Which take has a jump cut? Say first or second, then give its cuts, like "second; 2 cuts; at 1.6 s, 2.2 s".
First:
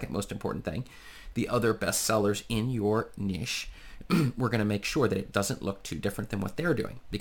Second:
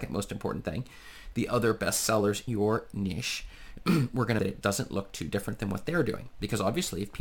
second; 2 cuts; at 2.5 s, 4.4 s